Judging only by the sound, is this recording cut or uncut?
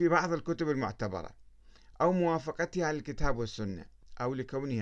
uncut